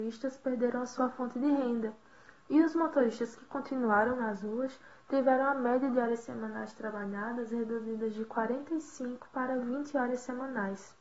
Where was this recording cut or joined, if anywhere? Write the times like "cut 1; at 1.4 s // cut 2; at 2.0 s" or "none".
none